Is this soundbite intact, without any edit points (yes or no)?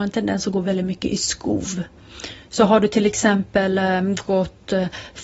yes